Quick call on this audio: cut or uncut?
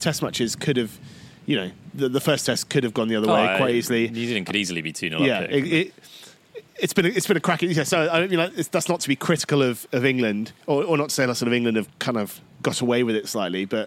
cut